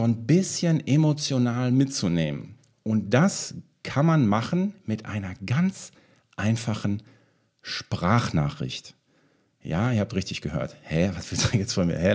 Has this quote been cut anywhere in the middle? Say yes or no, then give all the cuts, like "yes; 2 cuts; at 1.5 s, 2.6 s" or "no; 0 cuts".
no; 0 cuts